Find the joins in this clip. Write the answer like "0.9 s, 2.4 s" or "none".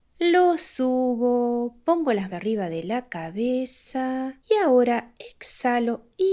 2.3 s, 4.4 s